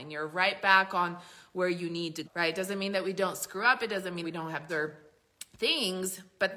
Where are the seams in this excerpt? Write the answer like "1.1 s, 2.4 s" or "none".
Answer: 2.2 s, 4.2 s, 4.7 s